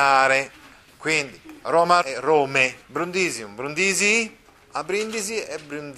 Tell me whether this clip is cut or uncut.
cut